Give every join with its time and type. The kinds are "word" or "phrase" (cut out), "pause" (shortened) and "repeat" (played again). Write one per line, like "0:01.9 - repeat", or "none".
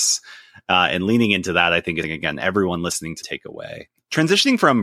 0:02.0 - word
0:03.2 - phrase

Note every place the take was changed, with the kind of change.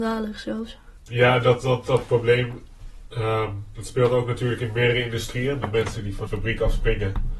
0:01.0 - pause
0:05.6 - phrase
0:06.3 - phrase

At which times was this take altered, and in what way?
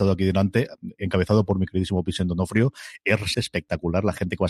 0:03.3 - word

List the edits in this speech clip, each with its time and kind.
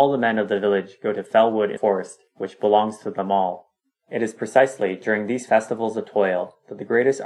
0:01.8 - word

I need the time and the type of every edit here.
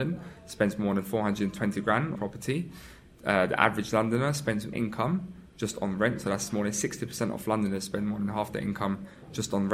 0:02.2 - phrase
0:04.7 - phrase

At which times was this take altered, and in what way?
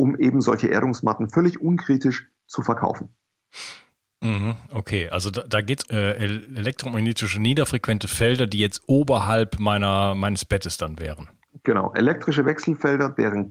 0:05.8 - word

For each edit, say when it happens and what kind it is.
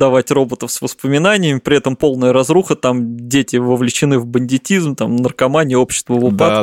none

